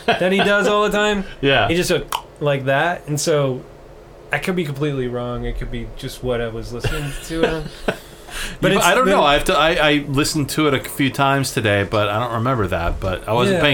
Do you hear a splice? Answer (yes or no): no